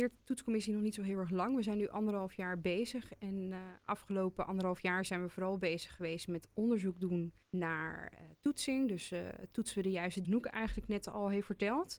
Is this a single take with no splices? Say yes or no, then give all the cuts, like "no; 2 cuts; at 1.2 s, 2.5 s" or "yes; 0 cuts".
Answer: no; 2 cuts; at 7.4 s, 10.2 s